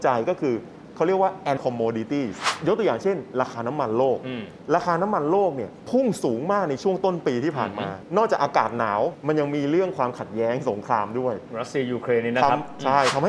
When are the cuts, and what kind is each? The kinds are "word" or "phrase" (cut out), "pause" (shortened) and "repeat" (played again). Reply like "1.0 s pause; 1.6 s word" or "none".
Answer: 1.6 s word